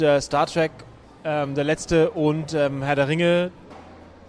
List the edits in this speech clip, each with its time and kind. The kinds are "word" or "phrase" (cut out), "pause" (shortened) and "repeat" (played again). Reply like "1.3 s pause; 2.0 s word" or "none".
none